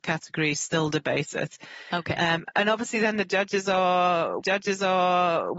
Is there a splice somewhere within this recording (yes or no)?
yes